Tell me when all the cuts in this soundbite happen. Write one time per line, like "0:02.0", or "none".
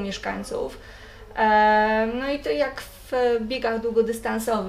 none

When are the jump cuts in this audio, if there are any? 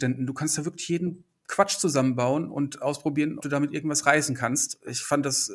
0:03.4

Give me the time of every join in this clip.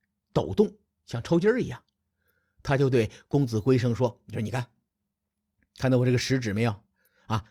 none

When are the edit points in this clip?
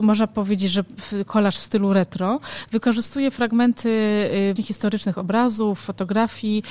0:04.6

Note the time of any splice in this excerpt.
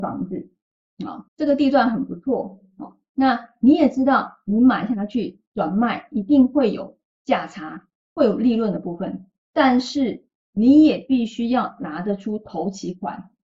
0:01.3

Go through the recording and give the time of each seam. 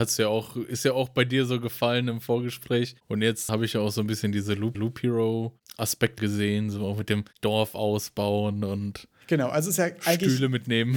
0:03.5
0:04.7
0:06.2

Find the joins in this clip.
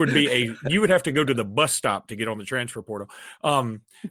none

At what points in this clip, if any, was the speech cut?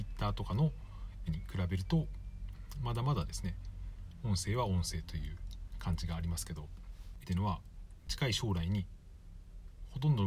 0:01.3
0:07.2

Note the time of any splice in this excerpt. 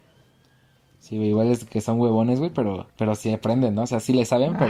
0:02.9

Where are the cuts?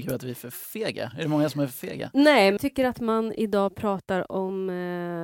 0:02.6

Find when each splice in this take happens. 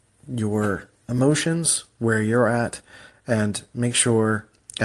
none

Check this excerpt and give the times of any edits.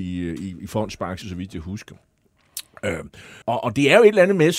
0:01.2
0:03.4

